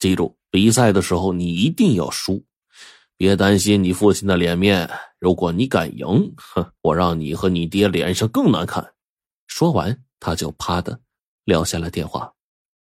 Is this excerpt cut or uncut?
cut